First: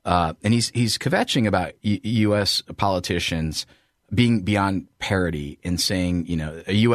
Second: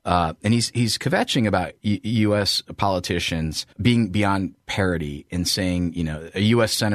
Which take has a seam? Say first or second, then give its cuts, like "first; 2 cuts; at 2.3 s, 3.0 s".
second; 1 cut; at 3.7 s